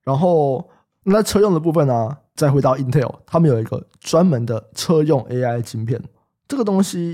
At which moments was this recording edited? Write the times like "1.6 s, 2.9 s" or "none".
none